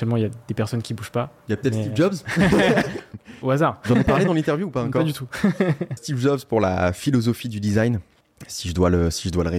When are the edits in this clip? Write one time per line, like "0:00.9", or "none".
0:01.4
0:06.0
0:08.2